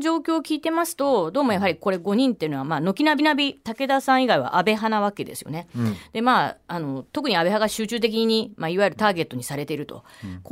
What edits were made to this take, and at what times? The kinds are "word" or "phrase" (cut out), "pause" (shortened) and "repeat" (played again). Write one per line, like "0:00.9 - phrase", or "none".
0:03.2 - repeat